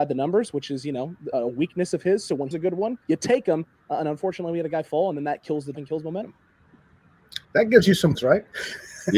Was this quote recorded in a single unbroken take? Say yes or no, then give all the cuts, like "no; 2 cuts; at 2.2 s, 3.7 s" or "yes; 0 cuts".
no; 6 cuts; at 1.3 s, 2.5 s, 3.0 s, 5.7 s, 7.4 s, 8.1 s